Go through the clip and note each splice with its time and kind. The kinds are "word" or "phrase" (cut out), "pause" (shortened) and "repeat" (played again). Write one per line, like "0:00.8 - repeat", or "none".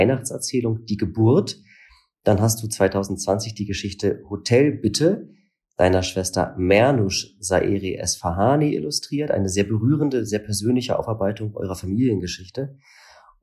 none